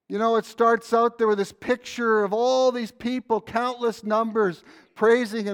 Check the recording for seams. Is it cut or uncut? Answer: uncut